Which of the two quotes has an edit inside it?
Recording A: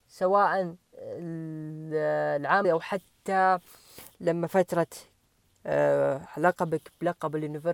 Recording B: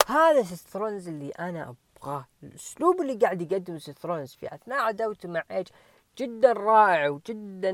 A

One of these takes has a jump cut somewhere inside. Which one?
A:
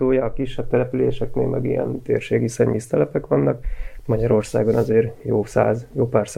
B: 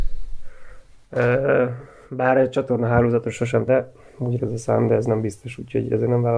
B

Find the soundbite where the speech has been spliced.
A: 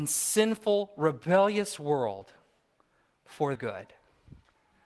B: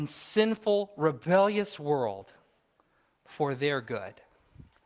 A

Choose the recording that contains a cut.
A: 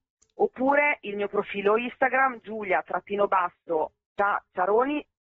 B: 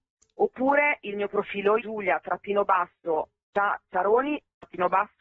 B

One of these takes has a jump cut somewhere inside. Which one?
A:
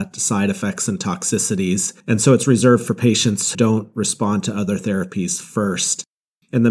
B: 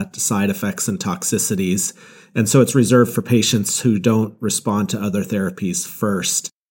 A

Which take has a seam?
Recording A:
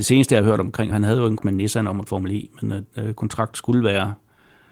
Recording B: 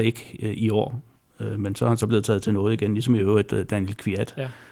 A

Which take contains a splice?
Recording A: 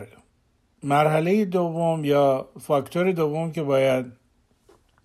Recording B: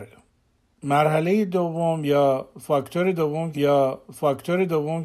B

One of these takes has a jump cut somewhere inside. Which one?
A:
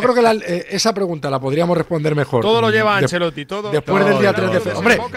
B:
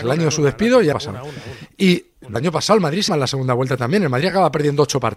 B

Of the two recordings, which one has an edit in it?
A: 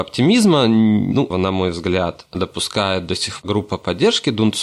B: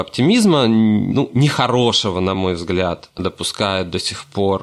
A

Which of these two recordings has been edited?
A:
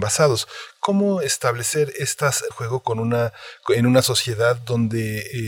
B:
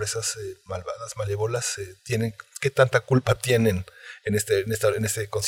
A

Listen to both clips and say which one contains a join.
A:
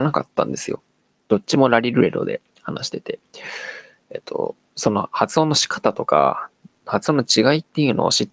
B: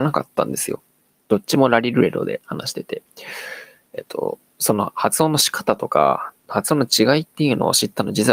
B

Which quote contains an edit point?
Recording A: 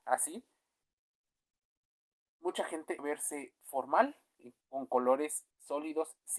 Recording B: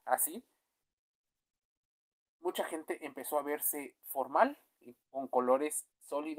A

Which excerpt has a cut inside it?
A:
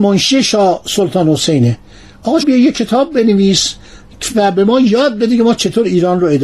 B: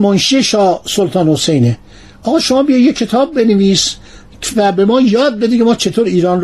A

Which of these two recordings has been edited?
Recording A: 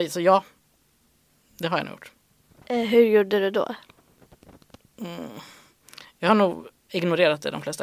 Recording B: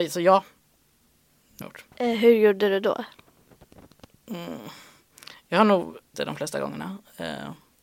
B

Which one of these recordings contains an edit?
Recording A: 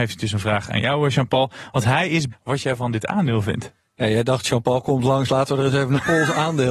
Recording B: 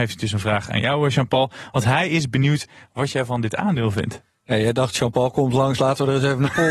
A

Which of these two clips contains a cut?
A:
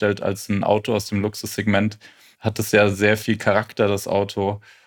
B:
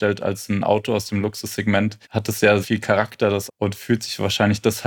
B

